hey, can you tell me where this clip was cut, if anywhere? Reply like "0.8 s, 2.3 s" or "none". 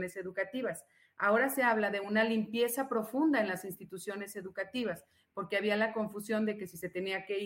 none